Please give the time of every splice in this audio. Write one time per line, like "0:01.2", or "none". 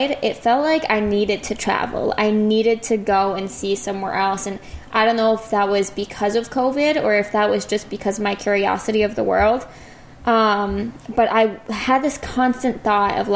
none